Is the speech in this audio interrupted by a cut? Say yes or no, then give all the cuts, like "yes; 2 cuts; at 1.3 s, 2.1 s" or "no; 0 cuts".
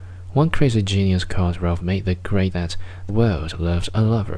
yes; 3 cuts; at 1.8 s, 2.5 s, 3.1 s